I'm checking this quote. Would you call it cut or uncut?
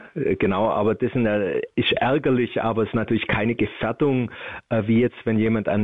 cut